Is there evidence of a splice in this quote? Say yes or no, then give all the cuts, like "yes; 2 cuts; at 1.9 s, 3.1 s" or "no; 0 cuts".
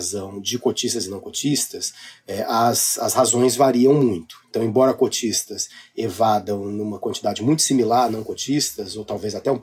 no; 0 cuts